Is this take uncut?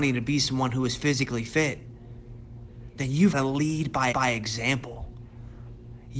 no; 2 cuts; at 3.3 s, 4.1 s

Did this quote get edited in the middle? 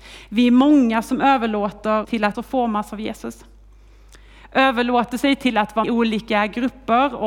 yes; 3 cuts; at 2.0 s, 2.3 s, 5.8 s

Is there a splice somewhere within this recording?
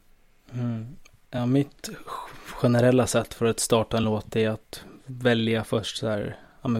no; 0 cuts

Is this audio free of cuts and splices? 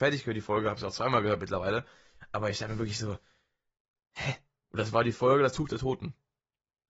yes; 0 cuts

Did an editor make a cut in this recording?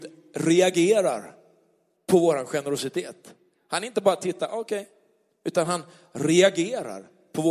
no; 0 cuts

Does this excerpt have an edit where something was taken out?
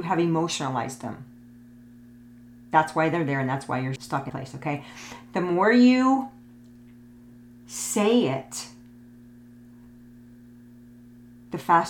yes; 2 cuts; at 4.0 s, 4.3 s

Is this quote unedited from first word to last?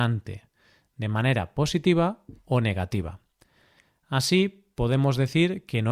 yes; 0 cuts

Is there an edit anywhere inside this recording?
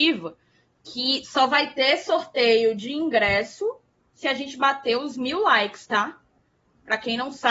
no; 0 cuts

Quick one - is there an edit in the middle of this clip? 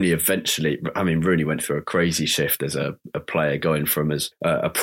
no; 0 cuts

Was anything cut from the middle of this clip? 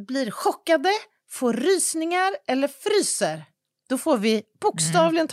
no; 0 cuts

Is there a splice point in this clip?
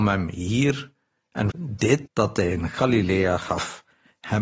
yes; 2 cuts; at 1.5 s, 2.1 s

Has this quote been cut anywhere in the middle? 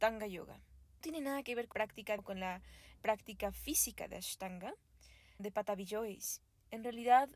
yes; 5 cuts; at 1.0 s, 1.7 s, 2.2 s, 3.0 s, 5.4 s

